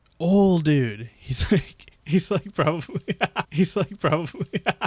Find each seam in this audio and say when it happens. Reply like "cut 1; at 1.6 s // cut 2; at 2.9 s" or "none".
cut 1; at 3.4 s

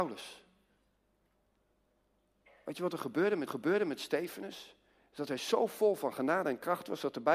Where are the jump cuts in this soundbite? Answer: cut 1; at 3.5 s

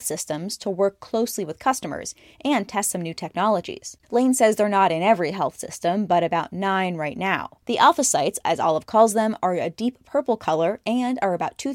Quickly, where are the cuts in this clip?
cut 1; at 4.0 s // cut 2; at 7.6 s

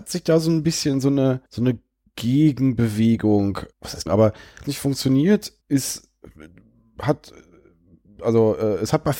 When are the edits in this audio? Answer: cut 1; at 1.5 s // cut 2; at 3.7 s // cut 3; at 4.1 s // cut 4; at 4.6 s // cut 5; at 5.6 s

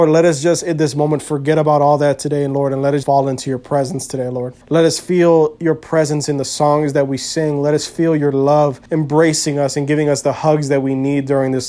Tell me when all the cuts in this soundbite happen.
cut 1; at 3.0 s // cut 2; at 4.6 s // cut 3; at 8.9 s

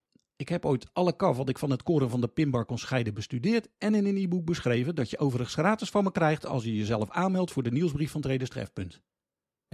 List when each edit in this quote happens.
none

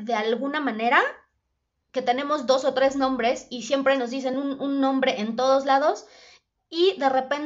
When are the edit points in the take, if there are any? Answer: none

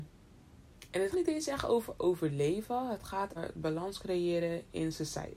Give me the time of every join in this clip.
cut 1; at 1.1 s // cut 2; at 3.4 s

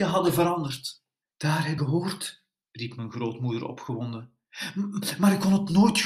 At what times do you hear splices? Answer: cut 1; at 1.2 s // cut 2; at 1.8 s // cut 3; at 2.6 s

